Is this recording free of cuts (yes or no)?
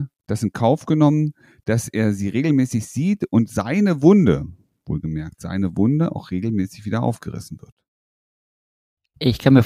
yes